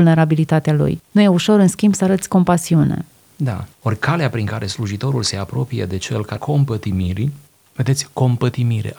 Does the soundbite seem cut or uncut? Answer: cut